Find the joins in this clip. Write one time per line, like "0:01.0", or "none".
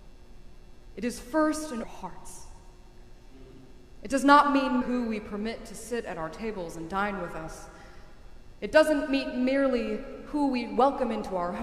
0:01.8
0:04.8